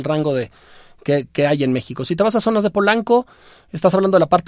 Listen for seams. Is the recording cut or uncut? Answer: uncut